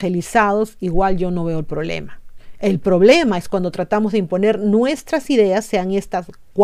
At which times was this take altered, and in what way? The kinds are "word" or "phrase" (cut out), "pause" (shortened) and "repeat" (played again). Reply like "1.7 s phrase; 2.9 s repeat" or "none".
none